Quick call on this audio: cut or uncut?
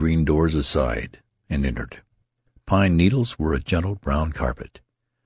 uncut